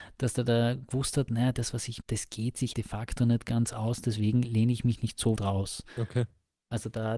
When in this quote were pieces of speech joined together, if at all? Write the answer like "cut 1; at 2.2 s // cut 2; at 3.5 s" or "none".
cut 1; at 2.0 s // cut 2; at 2.7 s // cut 3; at 5.4 s